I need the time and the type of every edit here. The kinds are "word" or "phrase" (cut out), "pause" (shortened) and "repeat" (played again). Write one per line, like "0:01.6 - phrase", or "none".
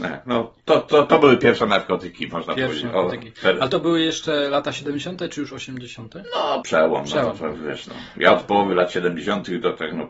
0:06.6 - word